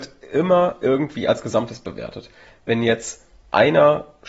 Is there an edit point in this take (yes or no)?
no